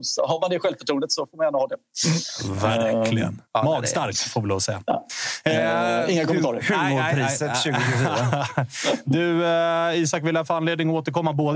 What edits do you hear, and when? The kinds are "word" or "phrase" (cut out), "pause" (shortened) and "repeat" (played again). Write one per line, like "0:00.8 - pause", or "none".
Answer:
0:03.4 - pause